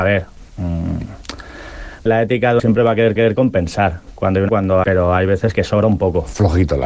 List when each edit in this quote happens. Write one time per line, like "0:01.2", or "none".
0:02.1
0:02.6
0:03.2
0:04.5
0:04.8
0:05.5